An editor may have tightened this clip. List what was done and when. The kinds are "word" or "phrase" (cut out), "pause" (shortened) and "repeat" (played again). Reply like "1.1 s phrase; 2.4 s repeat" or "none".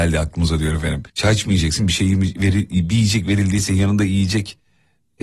1.1 s pause